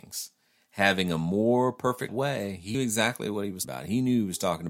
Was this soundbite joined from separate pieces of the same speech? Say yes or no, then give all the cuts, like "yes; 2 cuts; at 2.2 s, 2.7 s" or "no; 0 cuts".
yes; 3 cuts; at 2.1 s, 2.7 s, 3.6 s